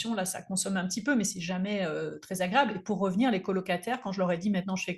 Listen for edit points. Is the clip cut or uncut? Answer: uncut